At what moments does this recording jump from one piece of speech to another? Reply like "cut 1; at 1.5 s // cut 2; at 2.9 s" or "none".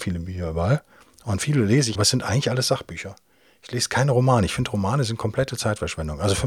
cut 1; at 1.9 s